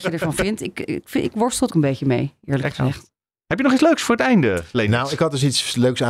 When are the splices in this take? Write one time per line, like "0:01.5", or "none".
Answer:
0:01.7

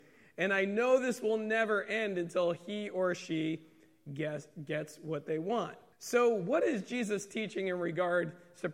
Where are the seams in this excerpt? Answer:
0:05.9

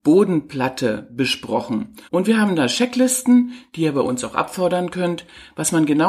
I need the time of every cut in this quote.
0:02.1

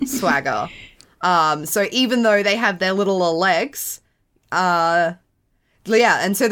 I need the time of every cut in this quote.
none

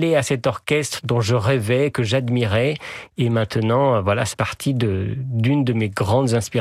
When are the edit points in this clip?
0:01.0
0:04.3

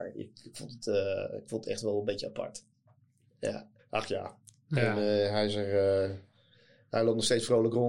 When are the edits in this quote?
0:03.8

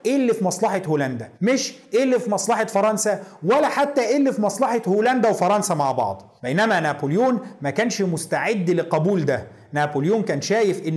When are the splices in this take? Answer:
0:01.3
0:06.4

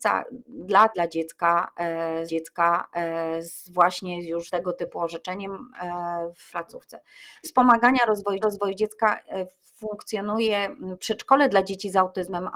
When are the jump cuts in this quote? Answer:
0:00.9
0:02.3
0:04.5
0:06.5
0:07.4
0:08.4

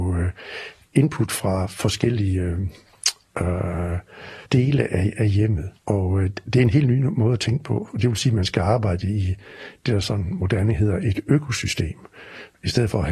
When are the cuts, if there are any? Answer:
0:04.5
0:05.8

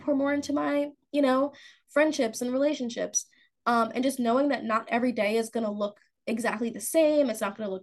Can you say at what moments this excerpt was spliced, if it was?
none

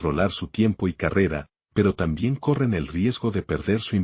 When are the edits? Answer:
none

